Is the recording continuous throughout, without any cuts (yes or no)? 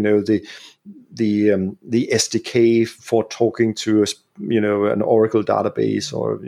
no